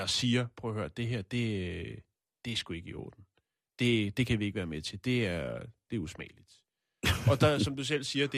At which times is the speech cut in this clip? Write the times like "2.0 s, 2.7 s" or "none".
none